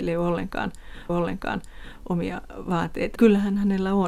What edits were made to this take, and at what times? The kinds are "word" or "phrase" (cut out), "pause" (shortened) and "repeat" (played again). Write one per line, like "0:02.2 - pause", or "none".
0:01.1 - repeat
0:03.2 - word